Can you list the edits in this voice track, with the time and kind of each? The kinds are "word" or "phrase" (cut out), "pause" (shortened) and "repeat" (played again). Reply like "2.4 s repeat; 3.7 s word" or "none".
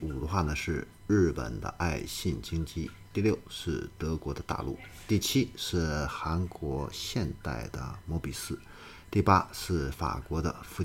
1.0 s pause